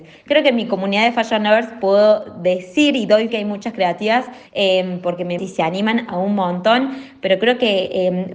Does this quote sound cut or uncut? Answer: cut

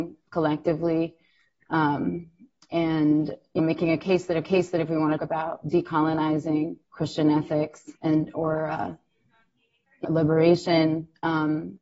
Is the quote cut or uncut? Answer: cut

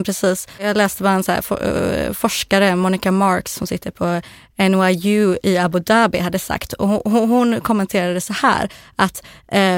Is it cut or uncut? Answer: uncut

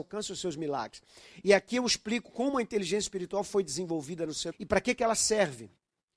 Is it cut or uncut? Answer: cut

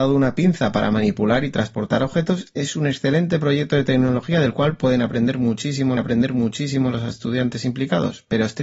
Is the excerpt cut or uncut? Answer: cut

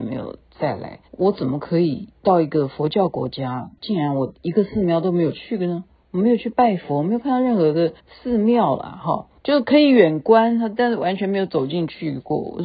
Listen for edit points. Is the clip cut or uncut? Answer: cut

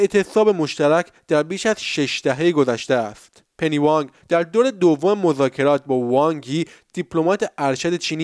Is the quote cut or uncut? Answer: cut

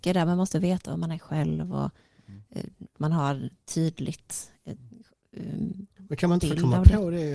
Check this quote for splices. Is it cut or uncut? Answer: cut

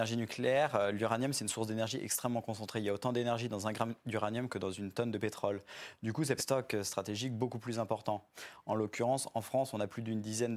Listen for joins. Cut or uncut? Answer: cut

